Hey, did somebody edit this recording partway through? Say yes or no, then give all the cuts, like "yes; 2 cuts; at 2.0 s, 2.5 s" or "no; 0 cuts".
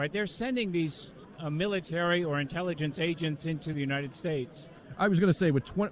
no; 0 cuts